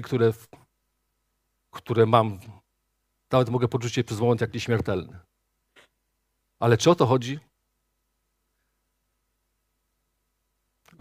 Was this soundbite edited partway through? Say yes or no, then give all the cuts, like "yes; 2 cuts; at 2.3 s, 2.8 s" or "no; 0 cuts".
no; 0 cuts